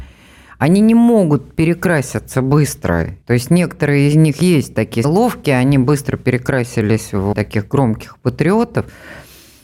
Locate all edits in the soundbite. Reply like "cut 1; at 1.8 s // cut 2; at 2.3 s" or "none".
cut 1; at 3.2 s // cut 2; at 5.0 s // cut 3; at 7.3 s